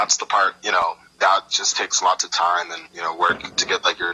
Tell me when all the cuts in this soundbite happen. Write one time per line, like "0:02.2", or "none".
0:02.9